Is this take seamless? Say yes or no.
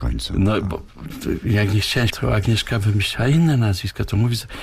no